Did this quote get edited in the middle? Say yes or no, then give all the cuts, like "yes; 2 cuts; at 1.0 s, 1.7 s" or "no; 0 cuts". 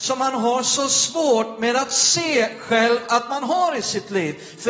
no; 0 cuts